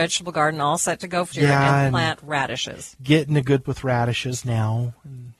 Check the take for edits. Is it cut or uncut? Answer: cut